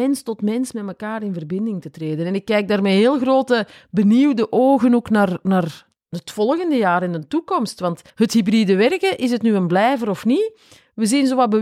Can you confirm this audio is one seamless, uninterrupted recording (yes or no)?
no